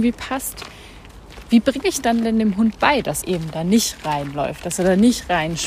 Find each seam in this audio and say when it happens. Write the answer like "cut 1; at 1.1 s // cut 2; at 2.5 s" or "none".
cut 1; at 3.2 s